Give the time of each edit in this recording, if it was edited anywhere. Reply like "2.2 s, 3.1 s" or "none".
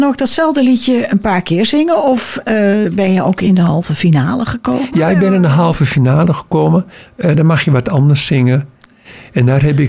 none